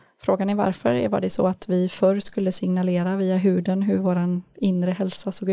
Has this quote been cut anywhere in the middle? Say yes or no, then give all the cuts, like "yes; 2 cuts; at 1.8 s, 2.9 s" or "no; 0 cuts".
no; 0 cuts